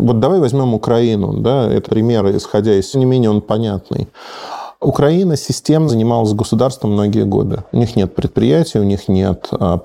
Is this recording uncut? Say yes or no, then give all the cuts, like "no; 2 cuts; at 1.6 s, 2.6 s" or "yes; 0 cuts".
no; 3 cuts; at 1.9 s, 2.9 s, 5.9 s